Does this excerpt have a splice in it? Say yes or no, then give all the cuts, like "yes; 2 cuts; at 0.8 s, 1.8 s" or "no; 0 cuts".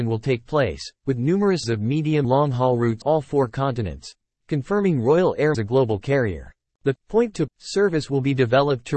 yes; 6 cuts; at 1.6 s, 2.2 s, 3.0 s, 5.5 s, 6.7 s, 7.5 s